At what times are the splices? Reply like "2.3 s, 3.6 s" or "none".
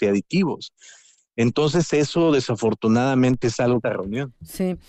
3.4 s, 3.8 s

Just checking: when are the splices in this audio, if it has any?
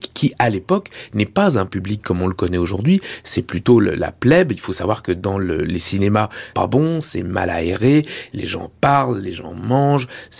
6.5 s

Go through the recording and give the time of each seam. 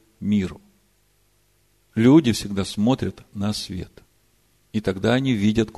none

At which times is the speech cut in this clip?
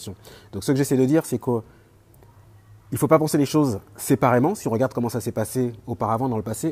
none

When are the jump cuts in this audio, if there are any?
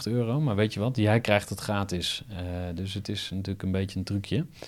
none

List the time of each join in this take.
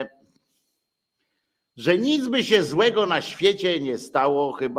none

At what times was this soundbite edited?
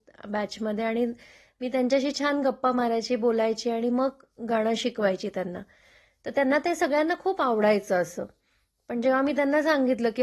none

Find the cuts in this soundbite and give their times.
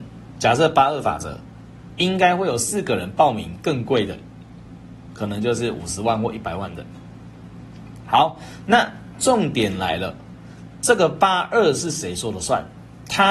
5.1 s

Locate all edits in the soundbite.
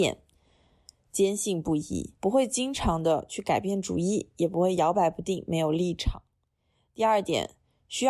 2.2 s

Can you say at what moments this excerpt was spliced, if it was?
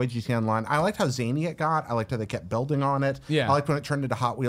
none

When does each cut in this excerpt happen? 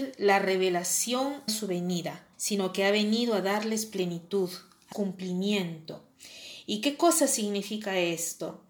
1.5 s, 2.3 s, 4.9 s

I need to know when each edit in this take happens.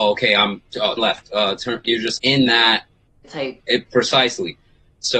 1.0 s, 1.8 s, 2.2 s, 3.2 s, 3.6 s

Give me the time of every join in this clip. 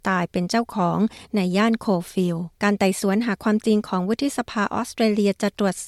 2.5 s

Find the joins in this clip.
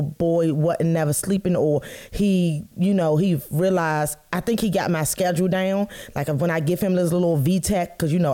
none

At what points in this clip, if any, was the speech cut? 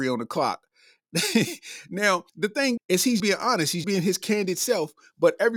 2.3 s, 2.8 s, 3.2 s, 3.8 s

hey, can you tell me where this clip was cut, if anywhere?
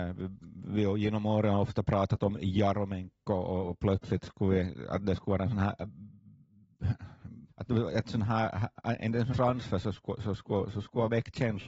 7.5 s, 9.3 s

